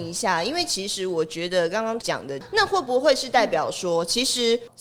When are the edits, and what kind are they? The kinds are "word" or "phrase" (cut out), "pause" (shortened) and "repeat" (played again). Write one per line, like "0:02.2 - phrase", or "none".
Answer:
0:02.0 - word